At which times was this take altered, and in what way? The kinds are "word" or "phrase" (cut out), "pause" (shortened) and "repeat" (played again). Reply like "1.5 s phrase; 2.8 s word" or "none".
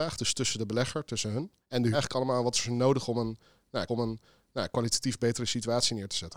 1.6 s pause; 1.9 s phrase; 3.9 s repeat